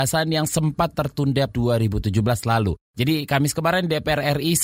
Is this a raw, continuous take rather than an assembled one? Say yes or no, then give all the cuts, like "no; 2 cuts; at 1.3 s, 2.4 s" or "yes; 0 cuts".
no; 2 cuts; at 1.5 s, 2.9 s